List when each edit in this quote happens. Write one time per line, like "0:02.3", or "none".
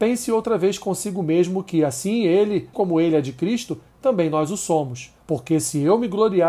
0:02.7
0:05.2